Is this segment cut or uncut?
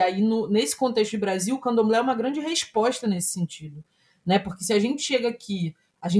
uncut